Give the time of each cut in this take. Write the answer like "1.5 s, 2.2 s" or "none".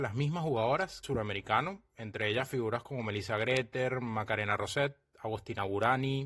1.0 s